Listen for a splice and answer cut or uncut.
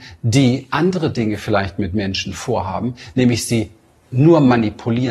uncut